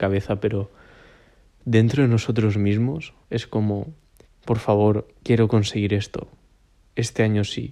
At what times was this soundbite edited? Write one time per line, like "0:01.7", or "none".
0:03.2
0:04.2
0:05.2

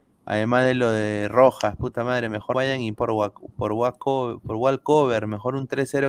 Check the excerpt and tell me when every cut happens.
0:02.5
0:03.0

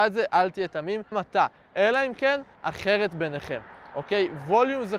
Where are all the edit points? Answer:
0:01.1
0:02.5

